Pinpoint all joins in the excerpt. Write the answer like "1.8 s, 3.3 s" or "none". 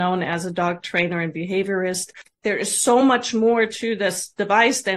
none

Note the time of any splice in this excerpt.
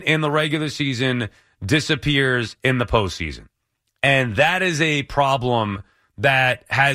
none

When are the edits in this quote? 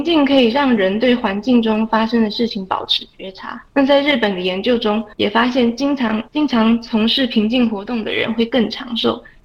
3.7 s, 5.1 s, 6.3 s

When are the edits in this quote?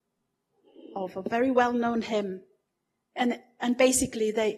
none

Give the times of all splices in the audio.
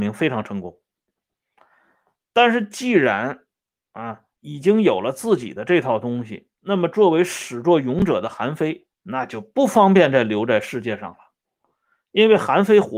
4.3 s, 6.5 s, 8.9 s

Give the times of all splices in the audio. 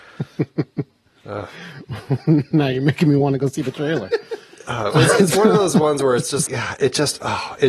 6.5 s

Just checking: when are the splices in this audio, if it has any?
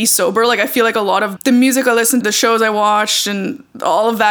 1.4 s, 2.2 s

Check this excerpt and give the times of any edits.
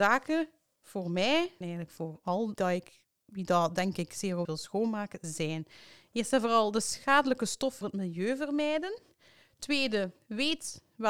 1.6 s, 2.5 s, 4.4 s, 7.8 s

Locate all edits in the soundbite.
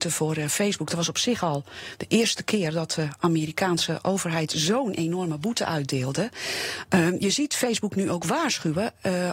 none

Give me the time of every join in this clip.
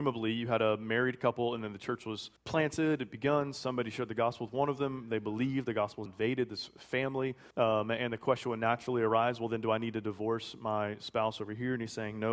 2.4 s, 6.1 s, 7.5 s

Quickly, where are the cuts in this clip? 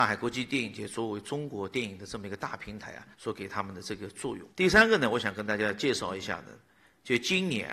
3.1 s, 4.5 s

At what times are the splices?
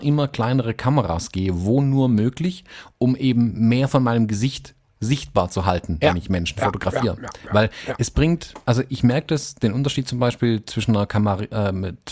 none

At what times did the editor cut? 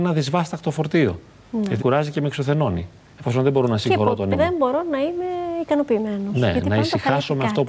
1.8 s, 4.3 s

